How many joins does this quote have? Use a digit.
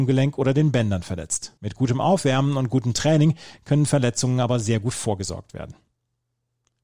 1